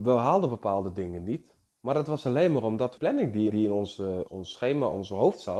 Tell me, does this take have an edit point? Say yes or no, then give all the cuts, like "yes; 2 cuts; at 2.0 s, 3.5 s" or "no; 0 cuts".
yes; 4 cuts; at 1.7 s, 3.0 s, 3.5 s, 4.3 s